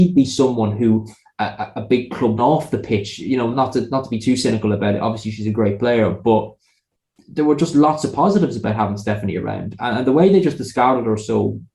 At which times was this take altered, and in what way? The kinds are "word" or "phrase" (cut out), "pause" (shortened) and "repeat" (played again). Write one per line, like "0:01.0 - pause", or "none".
0:02.4 - phrase
0:03.5 - word